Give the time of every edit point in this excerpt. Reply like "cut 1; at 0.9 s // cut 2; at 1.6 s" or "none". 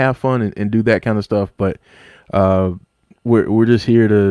cut 1; at 3.1 s